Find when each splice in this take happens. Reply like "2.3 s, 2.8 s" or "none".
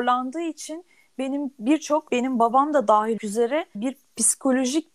2.1 s, 3.2 s, 3.7 s

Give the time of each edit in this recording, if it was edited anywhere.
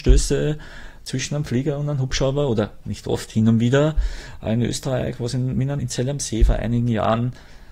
5.8 s

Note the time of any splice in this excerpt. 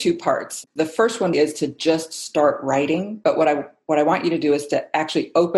1.3 s

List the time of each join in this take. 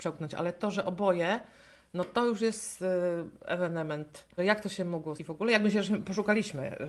4.4 s, 5.2 s

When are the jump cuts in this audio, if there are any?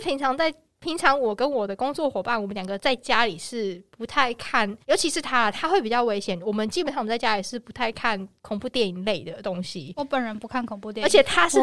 4.8 s, 8.4 s

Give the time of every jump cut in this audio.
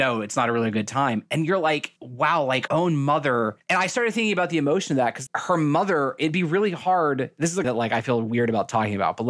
2.0 s, 2.7 s, 5.3 s, 7.6 s

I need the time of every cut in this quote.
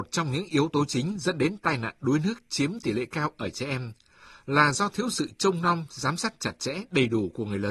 none

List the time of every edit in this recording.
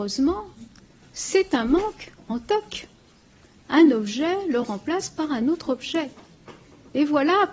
none

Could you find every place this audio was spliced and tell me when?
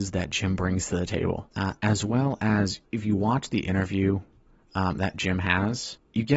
none

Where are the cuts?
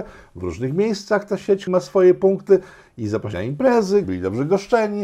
1.7 s, 3.3 s, 4.0 s

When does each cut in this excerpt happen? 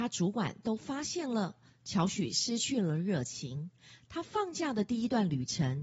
none

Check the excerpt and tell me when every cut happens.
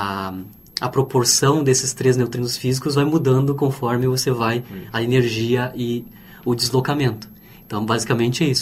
none

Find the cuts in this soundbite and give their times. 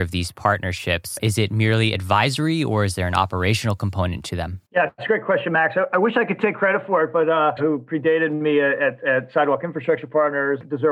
4.7 s, 7.6 s

